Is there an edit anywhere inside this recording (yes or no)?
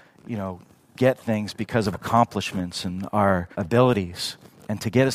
yes